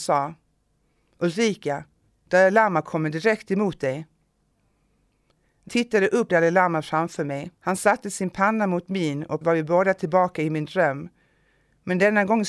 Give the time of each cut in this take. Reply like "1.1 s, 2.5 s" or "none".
5.7 s, 6.3 s, 7.6 s, 9.4 s